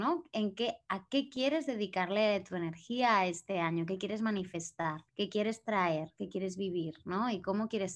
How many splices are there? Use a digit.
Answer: 1